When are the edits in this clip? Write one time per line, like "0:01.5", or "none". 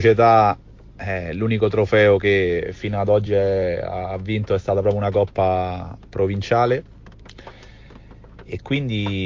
none